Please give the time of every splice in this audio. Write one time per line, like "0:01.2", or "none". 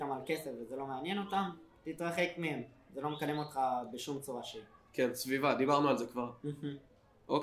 none

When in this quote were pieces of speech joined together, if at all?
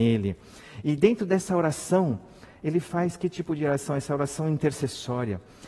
none

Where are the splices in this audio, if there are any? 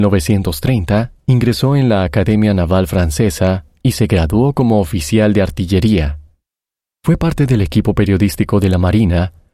none

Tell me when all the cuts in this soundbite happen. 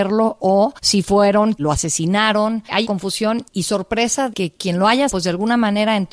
0:01.5
0:02.8
0:04.3
0:05.1

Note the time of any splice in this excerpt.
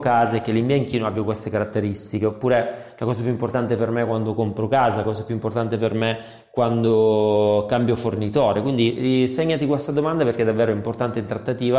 none

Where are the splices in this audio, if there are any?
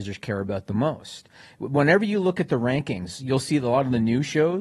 none

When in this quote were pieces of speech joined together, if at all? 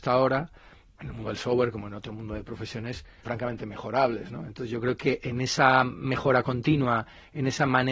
0:03.2

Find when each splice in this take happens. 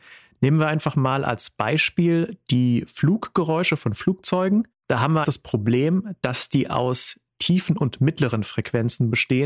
0:05.2

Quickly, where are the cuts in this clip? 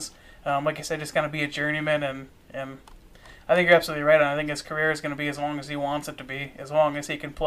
none

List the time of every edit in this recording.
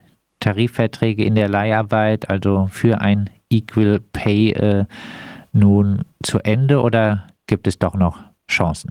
none

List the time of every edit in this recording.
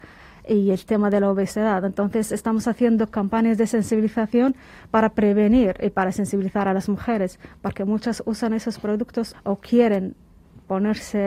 0:09.3

